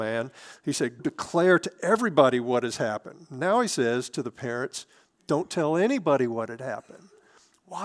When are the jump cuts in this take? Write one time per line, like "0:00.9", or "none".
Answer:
0:01.0